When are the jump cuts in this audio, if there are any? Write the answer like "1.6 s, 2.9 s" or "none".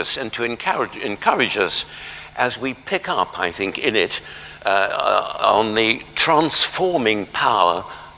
none